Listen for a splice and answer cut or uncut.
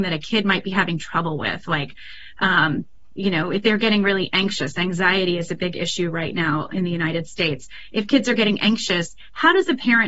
uncut